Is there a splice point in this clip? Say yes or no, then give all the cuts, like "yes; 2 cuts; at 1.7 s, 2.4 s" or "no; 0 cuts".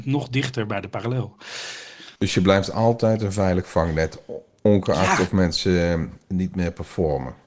yes; 1 cut; at 2.2 s